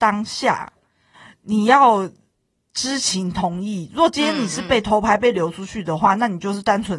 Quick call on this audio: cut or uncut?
uncut